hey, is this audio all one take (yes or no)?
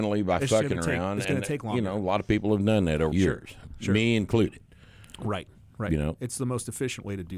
no